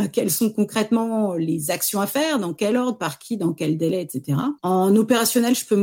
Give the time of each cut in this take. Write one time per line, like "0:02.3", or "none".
0:04.6

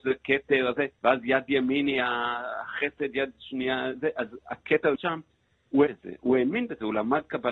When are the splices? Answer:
0:01.0
0:04.9
0:05.9

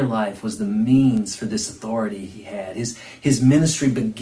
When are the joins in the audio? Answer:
none

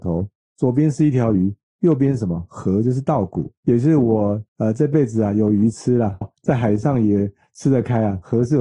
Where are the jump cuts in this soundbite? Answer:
0:03.6
0:04.5
0:06.2

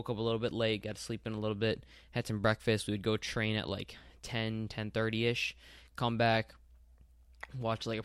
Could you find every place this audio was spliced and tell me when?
0:04.2

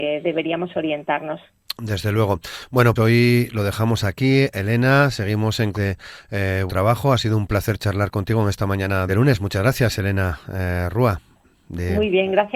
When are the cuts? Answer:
0:03.0
0:05.7
0:06.7
0:09.1

